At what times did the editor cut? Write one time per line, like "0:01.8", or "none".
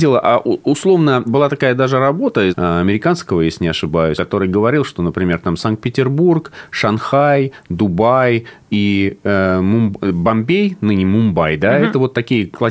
0:01.3
0:02.5
0:04.2

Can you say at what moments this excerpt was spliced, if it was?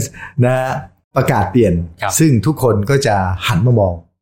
0:01.0

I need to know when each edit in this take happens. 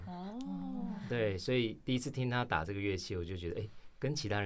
none

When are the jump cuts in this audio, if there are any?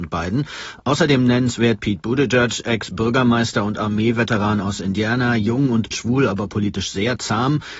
0:05.9

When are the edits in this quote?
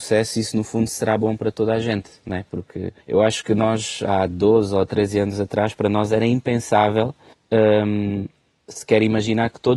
0:03.0
0:07.3

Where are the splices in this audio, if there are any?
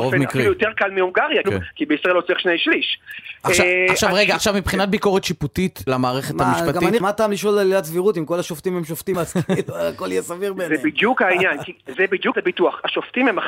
0:01.4
0:05.9
0:07.0
0:09.1
0:11.9
0:12.3

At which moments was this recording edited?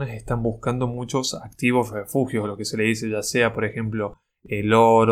none

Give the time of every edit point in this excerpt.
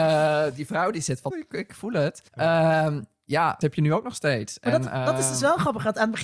0:01.3
0:02.3
0:03.6

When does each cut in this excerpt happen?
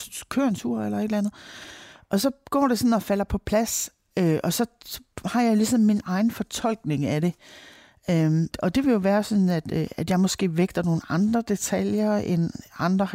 0:08.5

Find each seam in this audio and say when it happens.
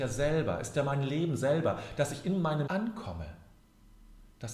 0:02.7

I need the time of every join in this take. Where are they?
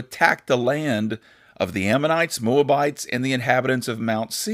none

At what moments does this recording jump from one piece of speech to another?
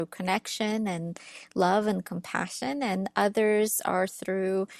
none

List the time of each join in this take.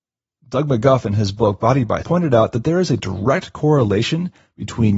0:02.0

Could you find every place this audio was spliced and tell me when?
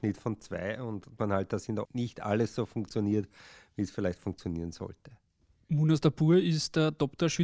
0:01.2
0:01.8

